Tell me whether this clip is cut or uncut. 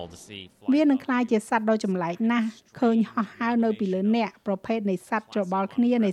uncut